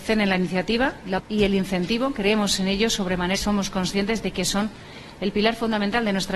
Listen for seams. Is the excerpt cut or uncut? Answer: cut